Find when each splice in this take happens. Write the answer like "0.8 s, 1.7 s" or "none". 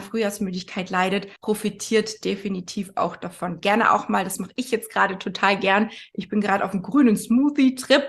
1.4 s